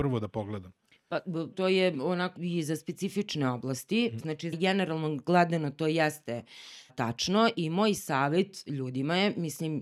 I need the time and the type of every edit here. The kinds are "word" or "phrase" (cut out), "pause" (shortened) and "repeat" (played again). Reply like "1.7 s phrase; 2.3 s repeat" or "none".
1.5 s word; 2.4 s word; 4.5 s phrase; 6.9 s word